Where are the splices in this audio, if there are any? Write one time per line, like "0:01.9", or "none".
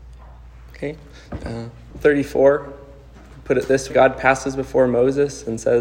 0:01.9
0:03.9